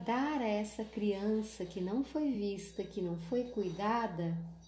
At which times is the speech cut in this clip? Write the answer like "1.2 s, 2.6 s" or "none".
none